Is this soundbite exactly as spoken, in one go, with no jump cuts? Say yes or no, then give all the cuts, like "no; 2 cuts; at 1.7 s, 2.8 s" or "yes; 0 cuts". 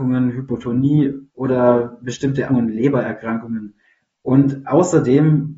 no; 3 cuts; at 1.3 s, 2.5 s, 3.8 s